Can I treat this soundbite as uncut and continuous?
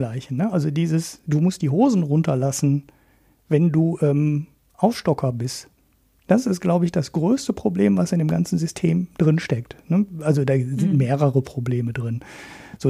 yes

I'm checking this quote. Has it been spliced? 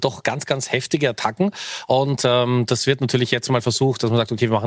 no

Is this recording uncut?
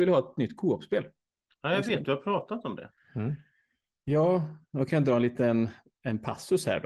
yes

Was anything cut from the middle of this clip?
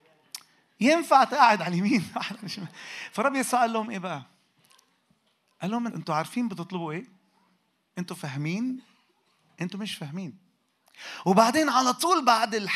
yes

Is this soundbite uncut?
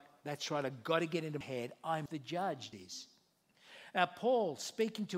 no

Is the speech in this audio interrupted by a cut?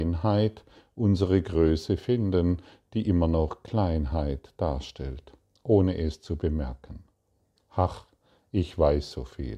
no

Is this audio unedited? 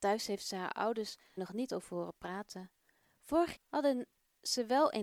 no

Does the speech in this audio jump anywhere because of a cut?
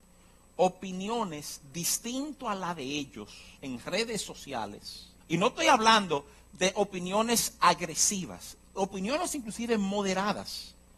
yes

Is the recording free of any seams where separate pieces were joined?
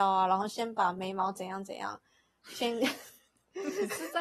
yes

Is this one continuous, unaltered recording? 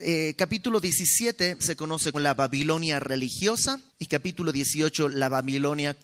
no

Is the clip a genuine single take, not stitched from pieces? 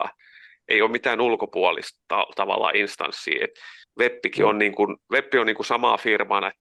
no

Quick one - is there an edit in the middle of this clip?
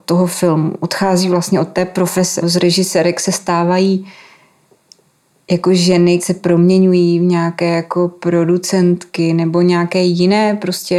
yes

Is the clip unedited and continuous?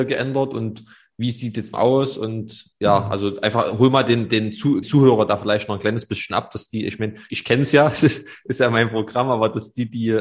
no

